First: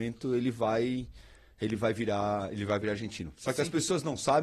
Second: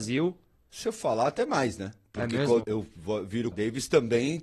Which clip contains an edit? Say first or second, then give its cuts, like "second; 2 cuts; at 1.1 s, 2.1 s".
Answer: second; 2 cuts; at 2.6 s, 3.5 s